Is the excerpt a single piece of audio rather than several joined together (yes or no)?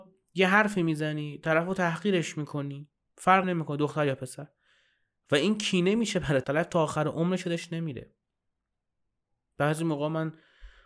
no